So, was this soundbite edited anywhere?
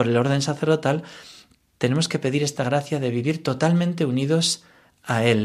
no; 0 cuts

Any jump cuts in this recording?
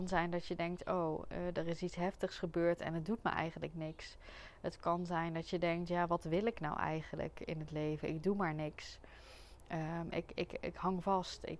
no; 0 cuts

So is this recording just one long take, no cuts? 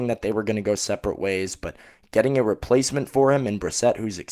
yes; 0 cuts

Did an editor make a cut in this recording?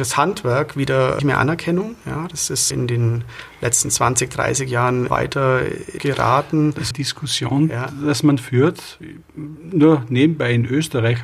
yes; 5 cuts; at 1.2 s, 2.7 s, 5.1 s, 6.0 s, 6.9 s

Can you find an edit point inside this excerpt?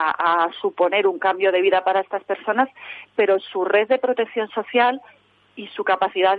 no; 0 cuts

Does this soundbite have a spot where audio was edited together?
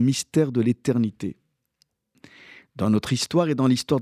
no; 0 cuts

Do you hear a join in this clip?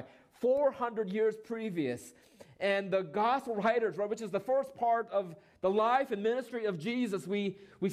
no; 0 cuts

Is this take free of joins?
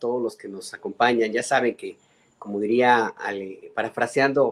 yes; 0 cuts

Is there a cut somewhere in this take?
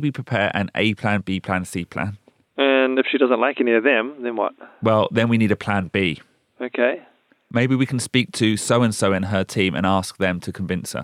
no; 0 cuts

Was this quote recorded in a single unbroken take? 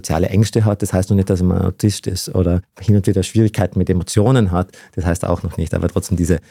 yes; 0 cuts

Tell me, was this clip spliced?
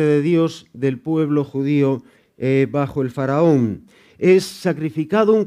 no; 0 cuts

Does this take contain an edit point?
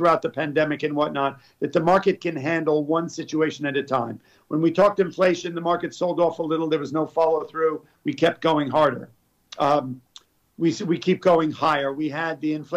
no; 0 cuts

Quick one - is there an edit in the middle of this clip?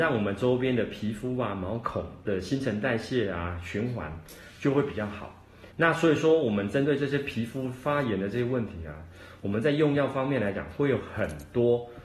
yes; 1 cut; at 5.7 s

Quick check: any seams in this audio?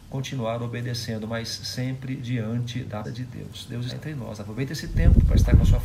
yes; 2 cuts; at 3.0 s, 3.9 s

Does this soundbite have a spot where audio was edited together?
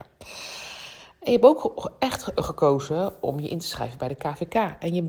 no; 0 cuts

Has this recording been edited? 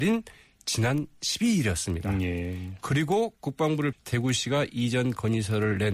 yes; 1 cut; at 3.9 s

